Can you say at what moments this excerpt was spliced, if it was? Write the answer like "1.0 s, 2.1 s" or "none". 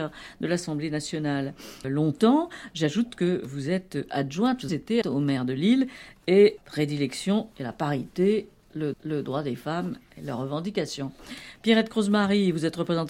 1.8 s, 4.7 s, 5.0 s, 6.6 s, 8.9 s